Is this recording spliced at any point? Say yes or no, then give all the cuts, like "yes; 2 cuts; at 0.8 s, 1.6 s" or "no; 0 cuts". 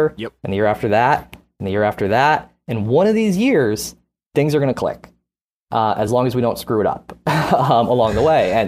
no; 0 cuts